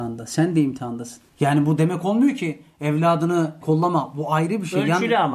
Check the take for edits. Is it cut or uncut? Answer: cut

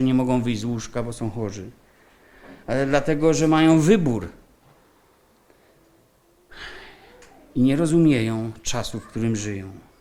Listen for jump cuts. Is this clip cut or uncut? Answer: uncut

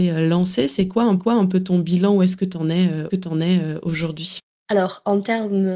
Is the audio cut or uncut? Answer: cut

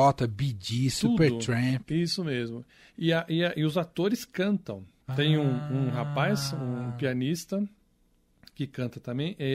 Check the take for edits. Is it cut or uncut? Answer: uncut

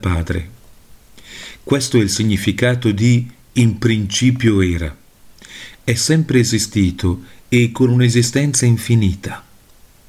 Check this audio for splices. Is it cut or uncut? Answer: uncut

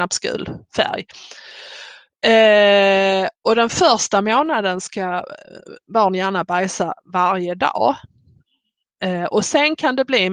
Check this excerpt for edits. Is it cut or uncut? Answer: uncut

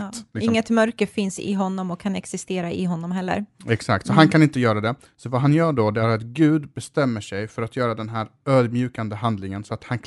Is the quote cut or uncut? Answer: uncut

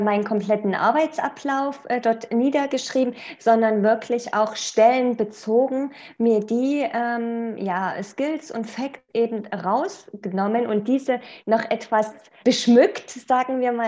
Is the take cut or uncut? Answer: cut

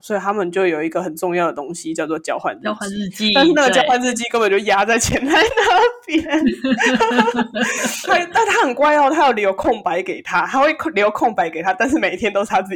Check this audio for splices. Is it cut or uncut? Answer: cut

